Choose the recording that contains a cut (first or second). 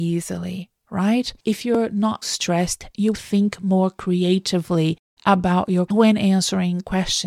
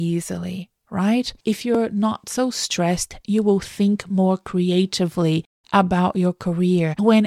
first